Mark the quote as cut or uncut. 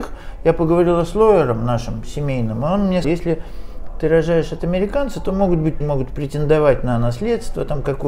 cut